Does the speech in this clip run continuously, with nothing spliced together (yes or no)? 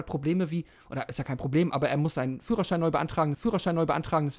no